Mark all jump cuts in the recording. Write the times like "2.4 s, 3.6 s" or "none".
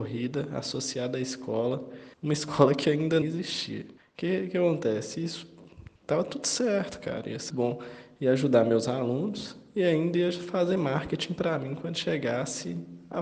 2.1 s, 3.2 s, 4.0 s, 6.0 s, 7.5 s